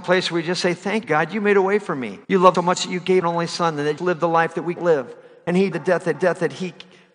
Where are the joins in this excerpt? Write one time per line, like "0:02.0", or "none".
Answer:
0:01.0
0:02.2
0:02.5
0:03.2
0:04.0
0:04.8
0:05.7
0:06.1